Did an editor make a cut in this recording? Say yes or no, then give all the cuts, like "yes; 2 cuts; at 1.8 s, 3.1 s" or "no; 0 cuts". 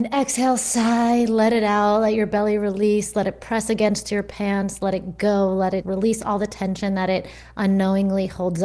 yes; 1 cut; at 5.8 s